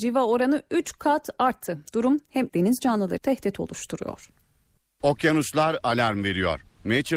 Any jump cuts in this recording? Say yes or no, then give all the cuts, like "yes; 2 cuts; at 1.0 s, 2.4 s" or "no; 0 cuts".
yes; 2 cuts; at 2.5 s, 3.2 s